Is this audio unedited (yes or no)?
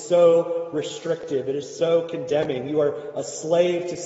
yes